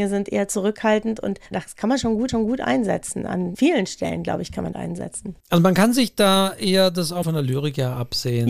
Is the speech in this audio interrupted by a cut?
yes; 5 cuts; at 1.5 s, 2.3 s, 4.7 s, 5.4 s, 7.2 s

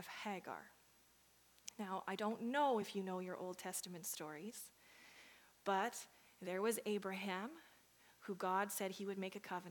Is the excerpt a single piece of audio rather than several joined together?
yes; 0 cuts

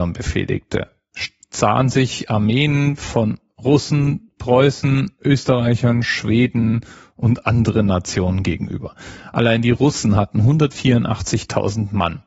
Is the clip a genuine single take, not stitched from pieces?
yes; 0 cuts

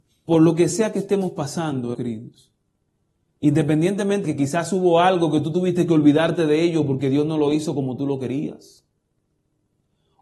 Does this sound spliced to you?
yes; 2 cuts; at 1.9 s, 4.2 s

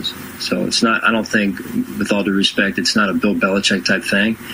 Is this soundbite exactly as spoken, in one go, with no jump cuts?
yes; 0 cuts

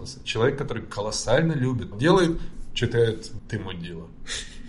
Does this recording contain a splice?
yes; 2 cuts; at 1.9 s, 3.4 s

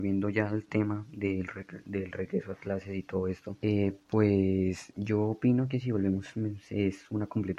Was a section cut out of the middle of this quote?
yes; 1 cut; at 3.6 s

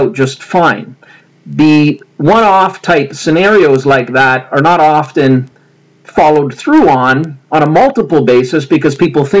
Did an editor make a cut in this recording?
no; 0 cuts

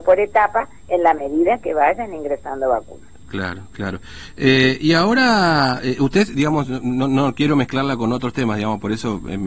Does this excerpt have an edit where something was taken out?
no; 0 cuts

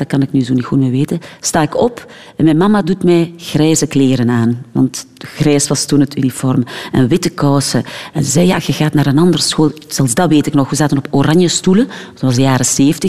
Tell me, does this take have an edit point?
no; 0 cuts

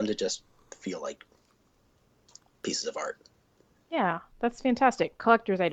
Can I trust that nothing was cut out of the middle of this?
yes; 0 cuts

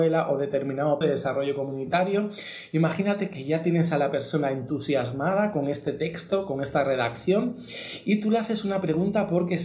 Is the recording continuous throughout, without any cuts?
no; 1 cut; at 1.0 s

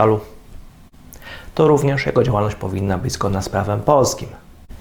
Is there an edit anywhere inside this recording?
no; 0 cuts

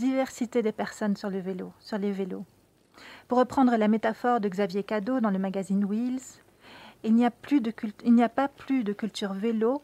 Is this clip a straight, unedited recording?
yes; 0 cuts

